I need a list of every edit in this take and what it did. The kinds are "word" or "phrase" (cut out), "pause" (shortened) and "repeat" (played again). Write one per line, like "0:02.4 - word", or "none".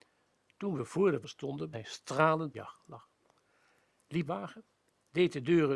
0:01.2 - word
0:01.7 - word
0:02.5 - word
0:04.3 - phrase